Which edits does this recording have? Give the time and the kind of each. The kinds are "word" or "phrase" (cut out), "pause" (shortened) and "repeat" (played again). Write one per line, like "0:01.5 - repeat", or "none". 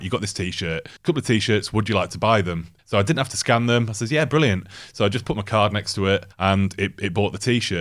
0:01.0 - pause
0:02.8 - pause
0:06.3 - pause

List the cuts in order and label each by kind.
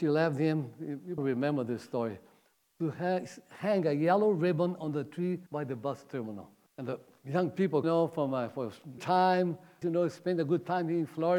0:01.2 - word
0:05.5 - pause
0:06.7 - pause
0:07.8 - phrase
0:09.0 - word
0:09.8 - word

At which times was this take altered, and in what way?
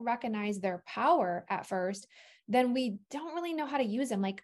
none

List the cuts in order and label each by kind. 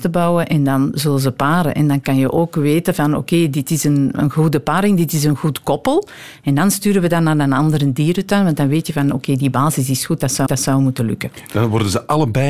0:10.5 - repeat

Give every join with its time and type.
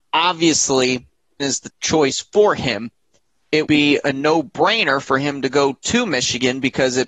0:01.4 - word
0:01.7 - word
0:03.7 - word

